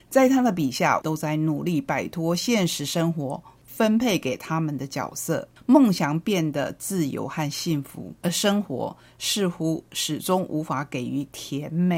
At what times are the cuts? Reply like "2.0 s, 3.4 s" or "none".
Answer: 1.0 s, 8.2 s